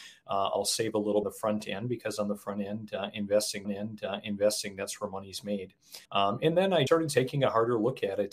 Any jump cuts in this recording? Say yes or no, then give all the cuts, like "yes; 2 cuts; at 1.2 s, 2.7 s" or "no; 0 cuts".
yes; 4 cuts; at 1.2 s, 3.6 s, 6.0 s, 6.9 s